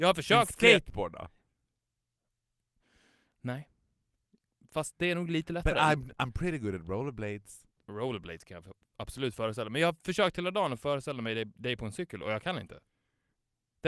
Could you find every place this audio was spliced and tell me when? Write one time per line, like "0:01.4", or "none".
none